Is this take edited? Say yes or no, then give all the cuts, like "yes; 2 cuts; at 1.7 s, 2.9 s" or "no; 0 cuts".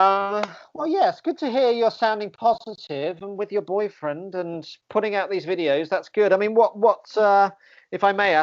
no; 0 cuts